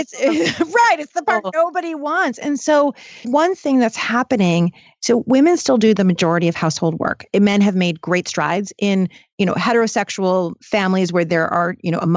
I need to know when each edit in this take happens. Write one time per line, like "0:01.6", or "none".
0:03.2